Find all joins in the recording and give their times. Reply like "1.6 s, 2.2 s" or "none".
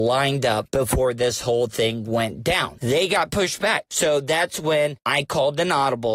none